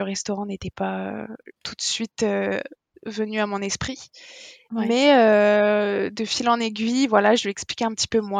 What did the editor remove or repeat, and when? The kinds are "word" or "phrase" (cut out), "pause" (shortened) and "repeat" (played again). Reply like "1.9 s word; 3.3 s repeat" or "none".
1.6 s pause; 2.9 s pause

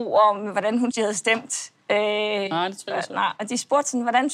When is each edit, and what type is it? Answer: 0.9 s word; 1.8 s pause

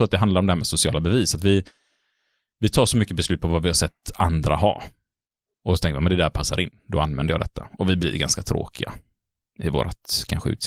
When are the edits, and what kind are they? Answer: none

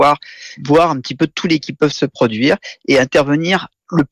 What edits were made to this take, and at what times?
1.6 s word

